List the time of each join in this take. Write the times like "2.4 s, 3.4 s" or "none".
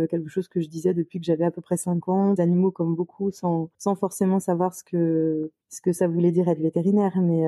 2.4 s, 3.7 s, 5.6 s